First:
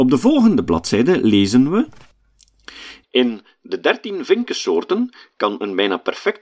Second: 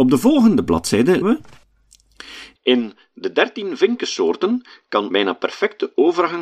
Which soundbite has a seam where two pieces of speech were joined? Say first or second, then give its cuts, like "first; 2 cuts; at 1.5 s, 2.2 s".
second; 2 cuts; at 1.2 s, 5.1 s